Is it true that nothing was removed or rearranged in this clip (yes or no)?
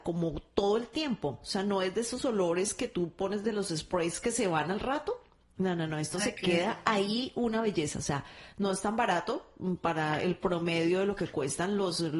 yes